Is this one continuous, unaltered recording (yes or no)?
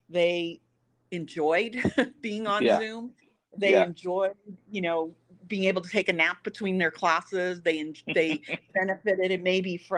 yes